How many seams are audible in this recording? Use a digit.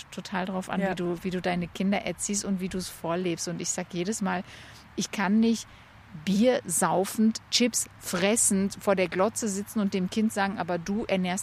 0